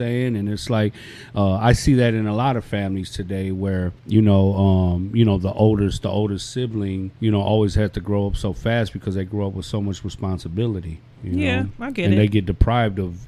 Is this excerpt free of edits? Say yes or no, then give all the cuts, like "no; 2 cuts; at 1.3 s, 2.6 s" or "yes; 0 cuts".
no; 3 cuts; at 4.0 s, 7.2 s, 11.1 s